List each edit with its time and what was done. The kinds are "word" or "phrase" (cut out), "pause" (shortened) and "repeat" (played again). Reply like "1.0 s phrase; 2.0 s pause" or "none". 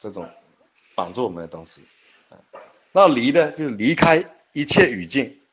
none